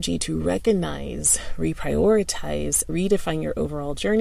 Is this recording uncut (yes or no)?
no